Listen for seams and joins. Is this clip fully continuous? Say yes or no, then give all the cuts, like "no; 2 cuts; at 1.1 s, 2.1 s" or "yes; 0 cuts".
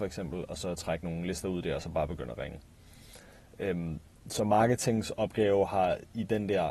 yes; 0 cuts